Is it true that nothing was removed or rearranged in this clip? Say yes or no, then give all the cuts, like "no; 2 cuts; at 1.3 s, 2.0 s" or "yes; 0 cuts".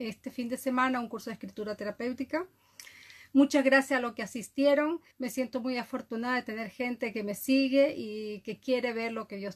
no; 1 cut; at 5.1 s